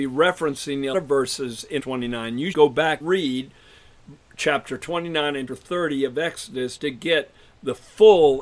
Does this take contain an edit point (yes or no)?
yes